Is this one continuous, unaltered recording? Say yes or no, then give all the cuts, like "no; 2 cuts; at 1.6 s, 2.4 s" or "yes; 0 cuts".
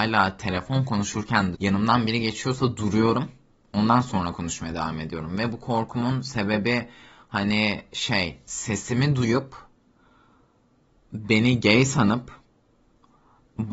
no; 1 cut; at 1.5 s